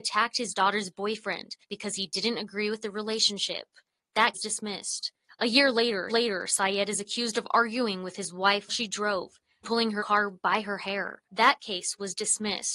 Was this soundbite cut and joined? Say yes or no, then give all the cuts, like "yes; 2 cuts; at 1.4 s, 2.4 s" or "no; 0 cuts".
yes; 7 cuts; at 1.6 s, 4.3 s, 6.1 s, 8.7 s, 9.6 s, 10.0 s, 11.2 s